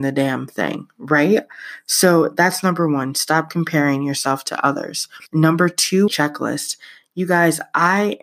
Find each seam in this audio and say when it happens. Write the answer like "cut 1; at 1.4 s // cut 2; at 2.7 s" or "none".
cut 1; at 5.3 s // cut 2; at 6.1 s